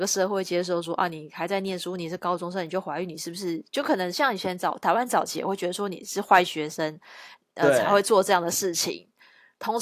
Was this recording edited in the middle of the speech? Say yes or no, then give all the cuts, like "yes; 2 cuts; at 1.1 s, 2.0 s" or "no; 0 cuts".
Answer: no; 0 cuts